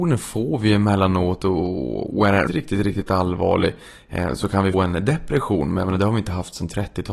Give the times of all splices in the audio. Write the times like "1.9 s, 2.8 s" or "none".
2.5 s, 4.7 s